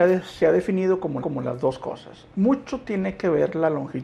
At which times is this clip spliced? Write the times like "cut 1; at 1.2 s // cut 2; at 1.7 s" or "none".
cut 1; at 1.2 s